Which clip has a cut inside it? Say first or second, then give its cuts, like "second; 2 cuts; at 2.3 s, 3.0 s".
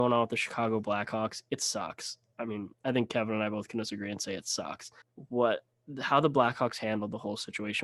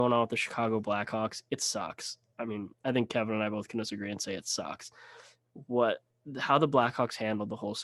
first; 1 cut; at 5.0 s